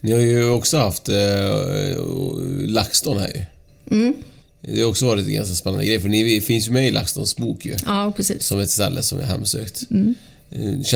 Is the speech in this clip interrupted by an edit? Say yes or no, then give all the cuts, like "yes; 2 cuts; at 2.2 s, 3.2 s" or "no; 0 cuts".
no; 0 cuts